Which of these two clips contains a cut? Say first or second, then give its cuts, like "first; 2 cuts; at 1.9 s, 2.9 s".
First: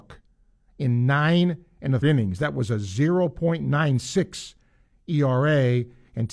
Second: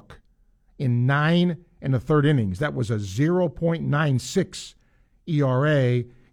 first; 1 cut; at 2.0 s